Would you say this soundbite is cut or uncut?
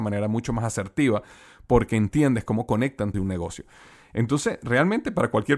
cut